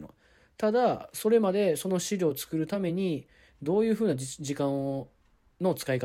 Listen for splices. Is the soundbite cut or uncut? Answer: uncut